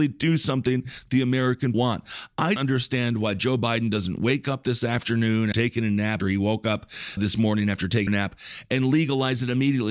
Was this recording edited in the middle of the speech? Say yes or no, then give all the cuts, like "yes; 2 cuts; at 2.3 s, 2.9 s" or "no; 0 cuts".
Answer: yes; 6 cuts; at 1.7 s, 2.6 s, 5.5 s, 6.2 s, 7.2 s, 8.1 s